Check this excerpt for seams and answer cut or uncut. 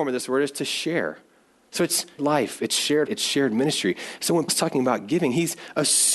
cut